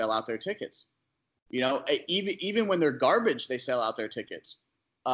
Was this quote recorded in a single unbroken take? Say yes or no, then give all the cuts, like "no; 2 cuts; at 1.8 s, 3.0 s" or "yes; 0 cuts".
yes; 0 cuts